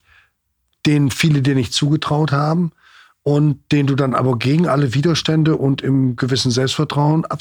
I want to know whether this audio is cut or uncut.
uncut